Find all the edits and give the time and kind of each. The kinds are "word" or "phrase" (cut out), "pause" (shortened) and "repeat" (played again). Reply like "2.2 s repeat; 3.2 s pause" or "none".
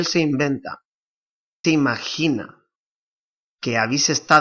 1.6 s phrase